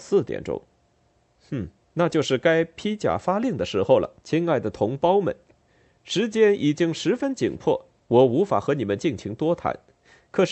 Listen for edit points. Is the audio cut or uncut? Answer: cut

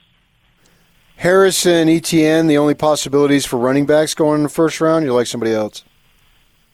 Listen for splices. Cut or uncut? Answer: uncut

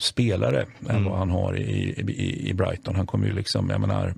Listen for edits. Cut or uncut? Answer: uncut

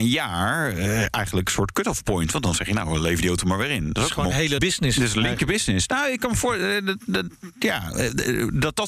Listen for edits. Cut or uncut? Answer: cut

